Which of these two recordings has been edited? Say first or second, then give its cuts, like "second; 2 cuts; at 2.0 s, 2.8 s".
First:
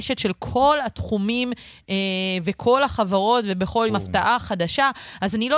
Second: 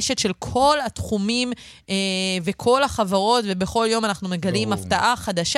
first; 1 cut; at 3.9 s